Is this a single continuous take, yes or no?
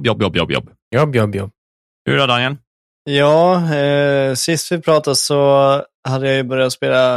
yes